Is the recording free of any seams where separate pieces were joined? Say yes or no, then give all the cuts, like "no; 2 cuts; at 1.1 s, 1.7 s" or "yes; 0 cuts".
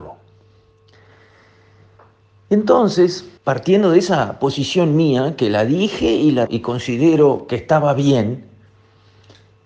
no; 2 cuts; at 3.4 s, 6.5 s